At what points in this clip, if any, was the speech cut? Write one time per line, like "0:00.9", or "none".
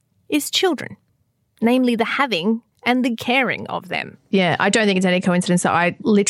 0:01.1
0:02.7